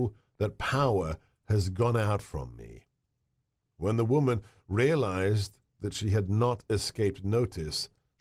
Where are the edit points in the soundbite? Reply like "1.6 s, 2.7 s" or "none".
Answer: none